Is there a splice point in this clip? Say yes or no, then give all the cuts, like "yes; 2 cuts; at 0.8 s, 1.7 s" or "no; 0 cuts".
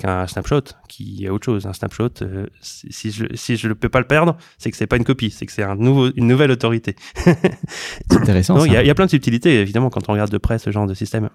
no; 0 cuts